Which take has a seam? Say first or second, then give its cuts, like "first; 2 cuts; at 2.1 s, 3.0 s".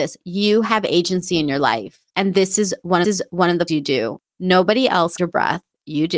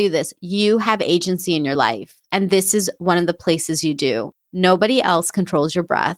first; 3 cuts; at 3.0 s, 3.7 s, 5.2 s